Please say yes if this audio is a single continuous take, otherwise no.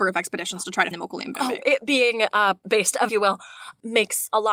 no